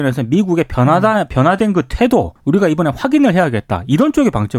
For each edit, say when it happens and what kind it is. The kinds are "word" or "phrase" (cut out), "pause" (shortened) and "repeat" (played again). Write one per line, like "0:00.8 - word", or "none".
0:02.4 - pause